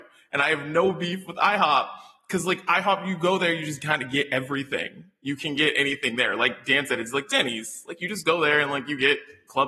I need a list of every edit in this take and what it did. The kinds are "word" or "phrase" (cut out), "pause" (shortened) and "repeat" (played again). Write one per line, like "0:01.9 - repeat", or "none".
none